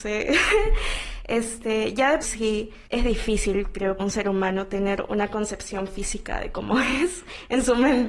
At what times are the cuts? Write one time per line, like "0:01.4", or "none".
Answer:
0:02.2
0:02.9
0:04.0